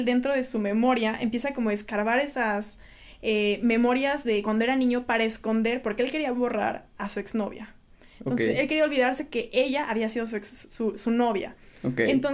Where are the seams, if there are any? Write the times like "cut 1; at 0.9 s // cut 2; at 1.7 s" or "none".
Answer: none